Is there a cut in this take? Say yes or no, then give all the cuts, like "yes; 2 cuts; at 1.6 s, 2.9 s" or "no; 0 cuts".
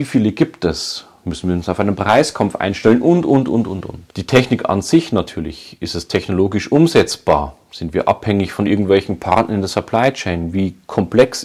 yes; 1 cut; at 4.1 s